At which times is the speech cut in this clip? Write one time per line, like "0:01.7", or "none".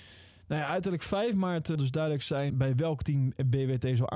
0:01.7
0:02.5